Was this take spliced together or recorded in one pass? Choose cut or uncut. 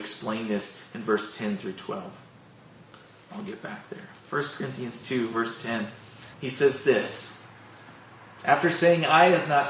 cut